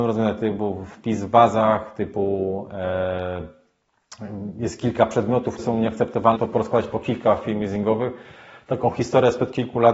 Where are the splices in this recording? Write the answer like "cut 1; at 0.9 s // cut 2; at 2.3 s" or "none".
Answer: cut 1; at 5.6 s // cut 2; at 6.4 s